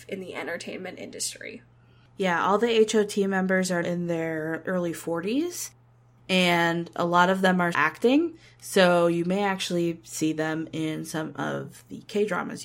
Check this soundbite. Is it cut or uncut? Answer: cut